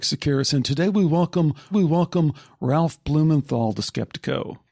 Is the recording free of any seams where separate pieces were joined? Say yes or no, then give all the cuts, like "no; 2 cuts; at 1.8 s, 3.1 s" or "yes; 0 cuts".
no; 1 cut; at 1.7 s